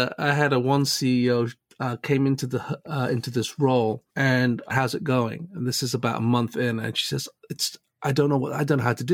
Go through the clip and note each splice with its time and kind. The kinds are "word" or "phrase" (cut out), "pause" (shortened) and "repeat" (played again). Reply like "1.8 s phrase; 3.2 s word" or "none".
4.1 s pause; 4.7 s word

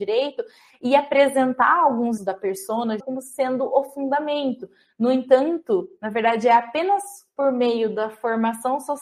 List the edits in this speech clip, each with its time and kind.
2.2 s word; 3.0 s word

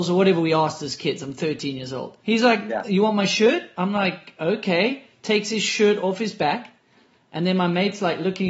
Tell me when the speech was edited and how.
2.2 s pause

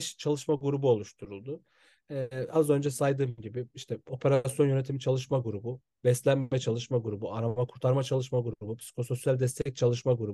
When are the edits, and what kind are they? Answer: none

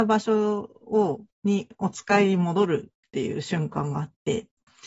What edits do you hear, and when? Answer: 1.3 s pause

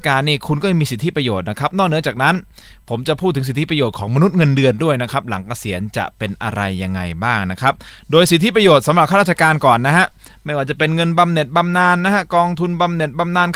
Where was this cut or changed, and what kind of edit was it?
none

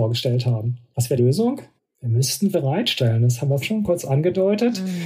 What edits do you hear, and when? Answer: 1.2 s word; 1.8 s pause; 2.5 s word; 3.6 s word

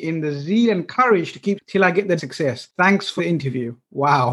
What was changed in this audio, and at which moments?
1.6 s word; 2.2 s word; 3.2 s word

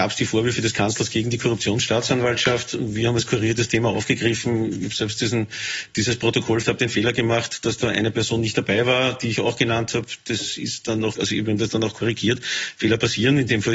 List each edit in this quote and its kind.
6.6 s word; 11.1 s word

